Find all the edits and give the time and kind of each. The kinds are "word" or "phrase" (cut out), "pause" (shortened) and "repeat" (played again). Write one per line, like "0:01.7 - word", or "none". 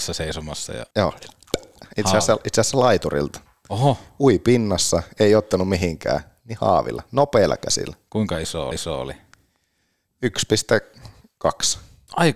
0:00.9 - pause
0:08.7 - repeat